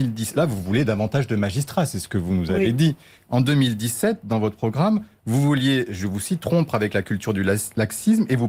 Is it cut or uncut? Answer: uncut